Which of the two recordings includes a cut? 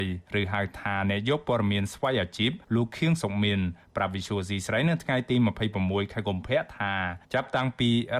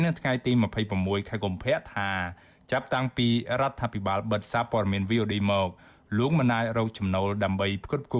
first; 2 cuts; at 2.6 s, 7.2 s

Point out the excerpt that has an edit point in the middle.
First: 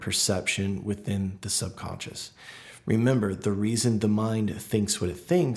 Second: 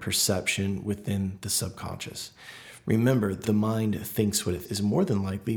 second; 2 cuts; at 3.4 s, 4.6 s

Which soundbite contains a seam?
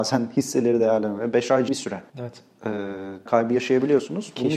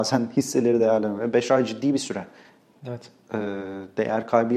first; 3 cuts; at 1.7 s, 2.1 s, 3.3 s

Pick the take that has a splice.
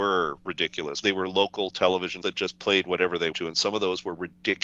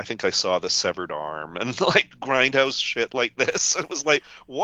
first; 3 cuts; at 1.0 s, 2.2 s, 3.3 s

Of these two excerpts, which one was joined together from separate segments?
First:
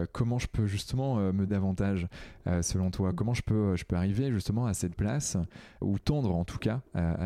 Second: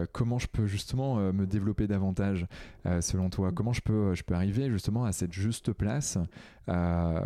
first; 3 cuts; at 1.5 s, 4.9 s, 5.8 s

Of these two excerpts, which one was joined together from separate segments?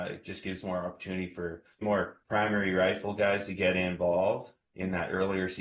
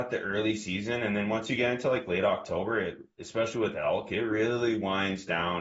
first; 3 cuts; at 1.8 s, 2.2 s, 4.6 s

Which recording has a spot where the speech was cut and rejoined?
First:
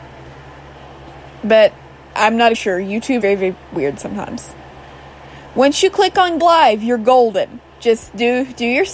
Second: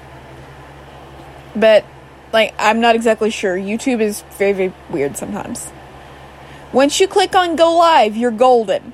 first; 5 cuts; at 2.1 s, 2.5 s, 3.2 s, 6.4 s, 7.7 s

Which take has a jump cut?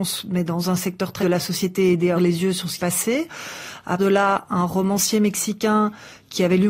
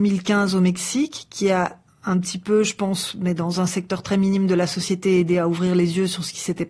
first; 4 cuts; at 1.2 s, 2.2 s, 2.8 s, 4.0 s

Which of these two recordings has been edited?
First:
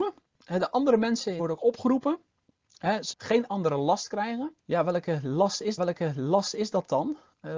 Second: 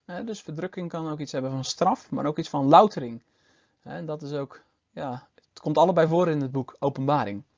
first; 4 cuts; at 1.4 s, 3.1 s, 4.6 s, 5.8 s

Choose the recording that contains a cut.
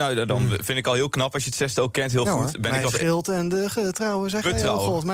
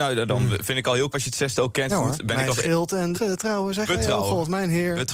second; 3 cuts; at 1.1 s, 1.9 s, 3.1 s

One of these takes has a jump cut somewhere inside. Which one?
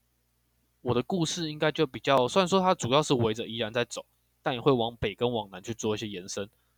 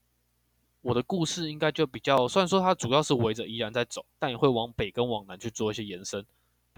second; 1 cut; at 4.1 s

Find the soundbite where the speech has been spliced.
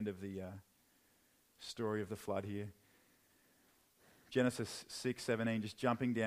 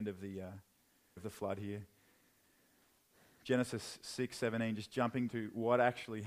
second; 2 cuts; at 1.2 s, 5.3 s

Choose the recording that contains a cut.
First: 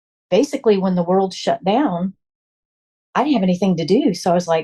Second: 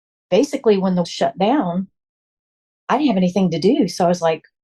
second; 1 cut; at 1.0 s

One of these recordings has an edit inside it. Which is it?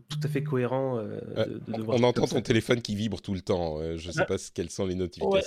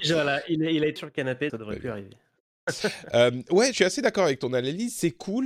second; 3 cuts; at 1.0 s, 1.5 s, 3.7 s

